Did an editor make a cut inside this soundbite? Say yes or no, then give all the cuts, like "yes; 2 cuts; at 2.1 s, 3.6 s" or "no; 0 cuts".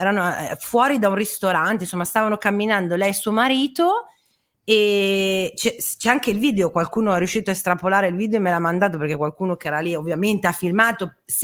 no; 0 cuts